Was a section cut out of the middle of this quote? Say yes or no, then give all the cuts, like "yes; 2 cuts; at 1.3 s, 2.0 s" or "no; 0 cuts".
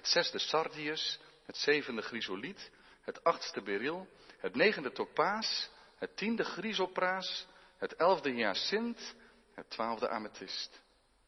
no; 0 cuts